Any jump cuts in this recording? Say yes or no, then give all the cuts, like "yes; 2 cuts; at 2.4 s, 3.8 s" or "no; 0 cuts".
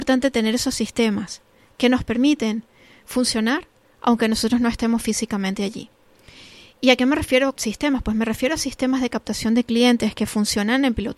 yes; 1 cut; at 7.5 s